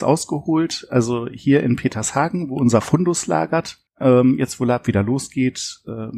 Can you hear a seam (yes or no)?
yes